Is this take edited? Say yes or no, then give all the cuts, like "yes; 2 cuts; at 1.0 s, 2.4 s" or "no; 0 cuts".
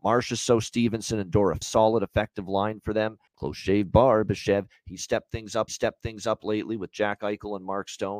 yes; 3 cuts; at 1.6 s, 3.3 s, 5.7 s